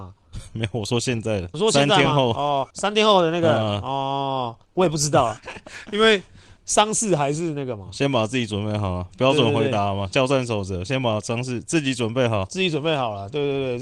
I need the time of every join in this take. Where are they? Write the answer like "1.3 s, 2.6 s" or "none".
1.5 s, 2.7 s, 4.6 s, 5.4 s, 6.6 s